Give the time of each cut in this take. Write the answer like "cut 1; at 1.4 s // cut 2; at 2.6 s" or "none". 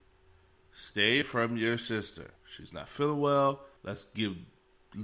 cut 1; at 1.2 s // cut 2; at 2.4 s // cut 3; at 3.8 s